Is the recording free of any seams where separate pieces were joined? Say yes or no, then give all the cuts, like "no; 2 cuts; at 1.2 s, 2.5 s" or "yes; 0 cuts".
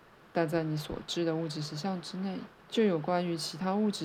no; 1 cut; at 2.6 s